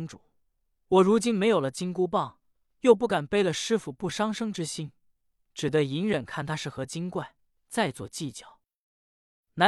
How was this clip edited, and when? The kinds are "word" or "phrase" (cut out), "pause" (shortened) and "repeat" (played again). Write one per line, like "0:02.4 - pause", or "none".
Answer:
none

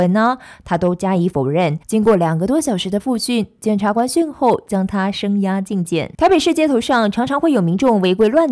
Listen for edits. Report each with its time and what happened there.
0:01.8 - pause

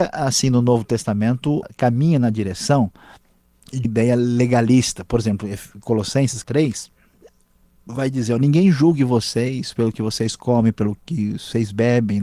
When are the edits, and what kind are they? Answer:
0:01.6 - word
0:03.8 - word
0:06.4 - word

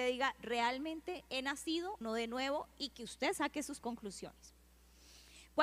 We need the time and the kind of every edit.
0:02.0 - word
0:03.8 - word

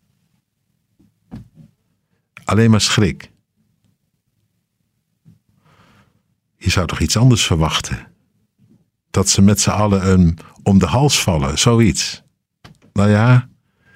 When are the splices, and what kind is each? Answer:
none

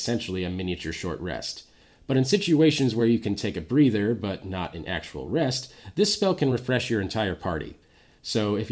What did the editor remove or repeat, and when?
none

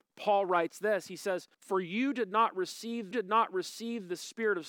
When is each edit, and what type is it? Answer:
0:01.5 - pause
0:03.1 - repeat

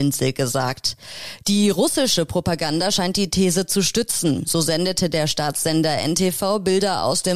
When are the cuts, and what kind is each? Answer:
none

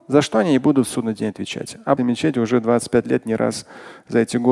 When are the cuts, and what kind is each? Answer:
0:02.0 - phrase

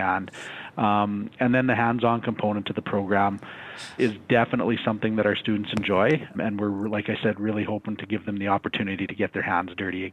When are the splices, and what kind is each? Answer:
0:04.0 - word
0:06.3 - word

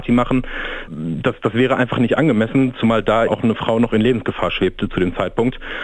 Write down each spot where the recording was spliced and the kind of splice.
0:03.3 - word

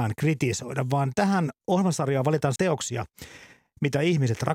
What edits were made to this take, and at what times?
0:01.6 - pause
0:02.6 - word

